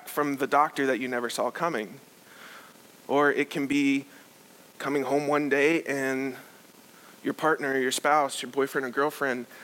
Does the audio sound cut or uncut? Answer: uncut